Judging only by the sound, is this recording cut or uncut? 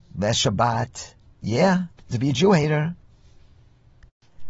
cut